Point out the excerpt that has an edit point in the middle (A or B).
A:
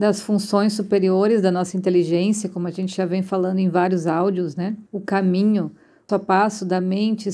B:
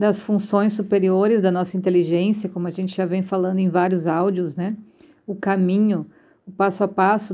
A